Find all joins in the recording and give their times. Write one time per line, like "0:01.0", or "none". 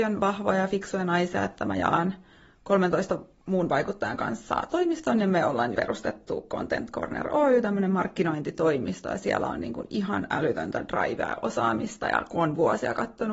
0:05.8